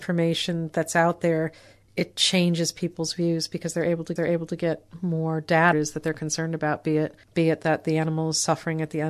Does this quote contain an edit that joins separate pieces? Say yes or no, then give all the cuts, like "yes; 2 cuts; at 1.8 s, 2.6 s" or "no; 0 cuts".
yes; 4 cuts; at 1.9 s, 4.2 s, 5.7 s, 7.2 s